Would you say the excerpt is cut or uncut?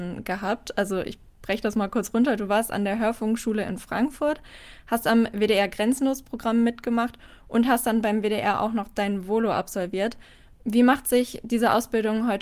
uncut